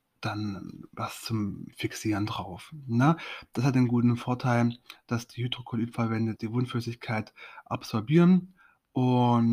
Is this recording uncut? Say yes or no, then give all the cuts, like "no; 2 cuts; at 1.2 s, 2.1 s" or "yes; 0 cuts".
no; 1 cut; at 6.4 s